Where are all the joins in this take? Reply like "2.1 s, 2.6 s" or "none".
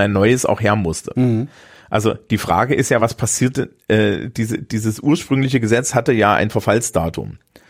none